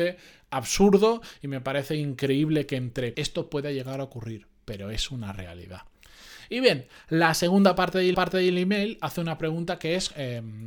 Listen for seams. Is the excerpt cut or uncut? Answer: cut